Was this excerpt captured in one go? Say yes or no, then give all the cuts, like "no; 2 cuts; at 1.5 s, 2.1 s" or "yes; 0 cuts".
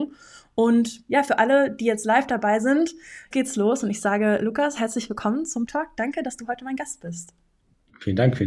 no; 2 cuts; at 3.3 s, 5.7 s